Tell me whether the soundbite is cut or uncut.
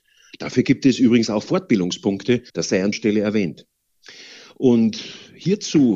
cut